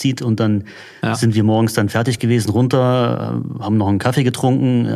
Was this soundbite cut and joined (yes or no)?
no